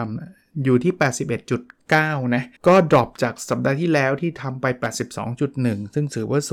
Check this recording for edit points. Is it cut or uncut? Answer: cut